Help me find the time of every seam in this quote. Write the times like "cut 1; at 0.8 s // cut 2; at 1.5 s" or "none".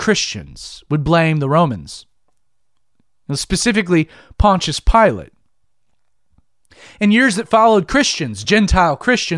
none